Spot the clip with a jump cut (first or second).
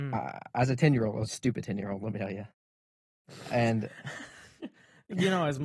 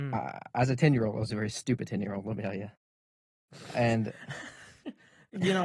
first